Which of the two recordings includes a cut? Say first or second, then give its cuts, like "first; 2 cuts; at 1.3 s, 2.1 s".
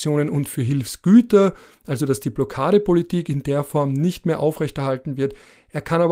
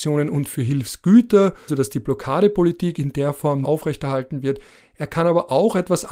second; 2 cuts; at 1.7 s, 3.6 s